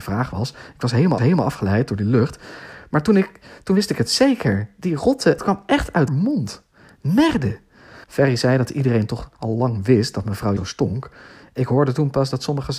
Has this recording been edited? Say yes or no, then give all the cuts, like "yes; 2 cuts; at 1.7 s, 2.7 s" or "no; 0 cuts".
yes; 6 cuts; at 1.2 s, 5.4 s, 6.1 s, 8.0 s, 9.3 s, 10.6 s